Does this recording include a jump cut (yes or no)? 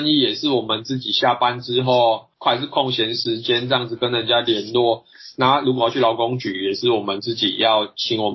yes